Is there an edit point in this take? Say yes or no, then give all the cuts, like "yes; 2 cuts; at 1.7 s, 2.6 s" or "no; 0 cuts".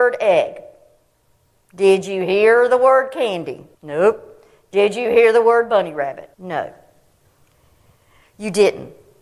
yes; 3 cuts; at 1.1 s, 3.7 s, 6.3 s